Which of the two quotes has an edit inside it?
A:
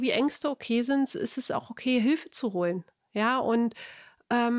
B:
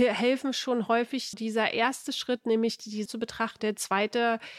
B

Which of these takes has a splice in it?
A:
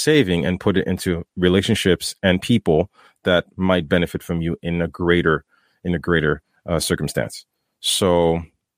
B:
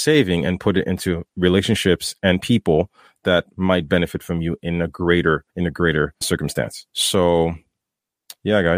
B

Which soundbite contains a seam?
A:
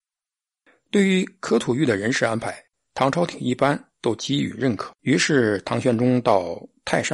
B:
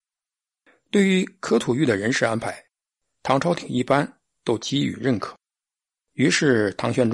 A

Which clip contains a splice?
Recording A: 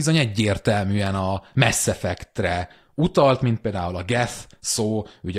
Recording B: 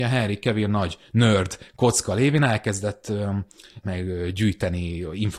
B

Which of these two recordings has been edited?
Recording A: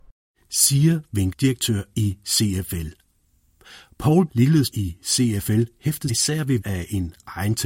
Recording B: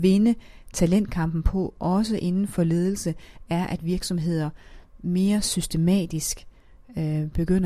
A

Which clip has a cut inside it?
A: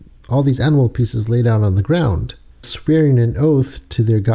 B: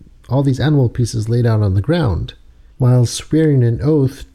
A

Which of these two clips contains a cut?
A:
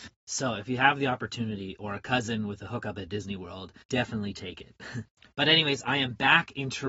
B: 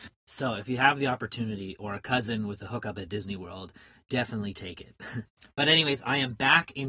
A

